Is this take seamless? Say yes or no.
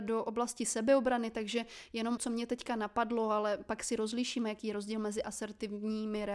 no